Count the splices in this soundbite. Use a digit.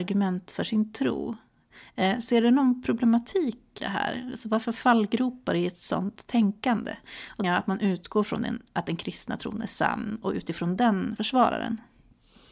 4